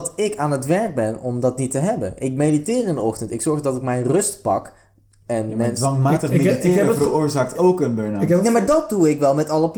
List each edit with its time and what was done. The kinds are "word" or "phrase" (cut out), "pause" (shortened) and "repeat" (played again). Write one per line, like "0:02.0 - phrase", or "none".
none